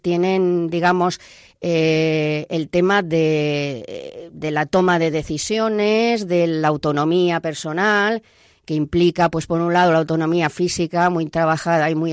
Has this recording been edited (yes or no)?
no